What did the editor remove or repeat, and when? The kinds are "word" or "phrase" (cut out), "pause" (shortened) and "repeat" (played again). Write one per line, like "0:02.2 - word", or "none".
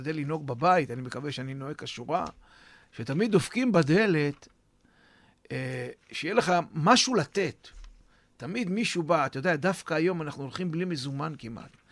none